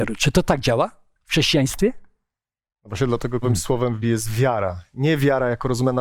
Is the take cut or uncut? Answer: cut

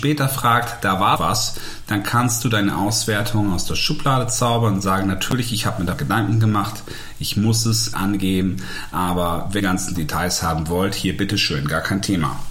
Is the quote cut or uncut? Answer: cut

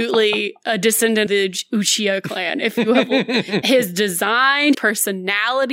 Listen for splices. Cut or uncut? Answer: cut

